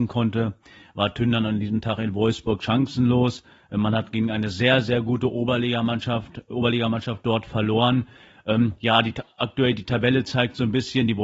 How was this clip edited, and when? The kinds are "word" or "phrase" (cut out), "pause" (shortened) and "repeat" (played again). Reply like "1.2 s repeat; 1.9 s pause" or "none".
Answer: none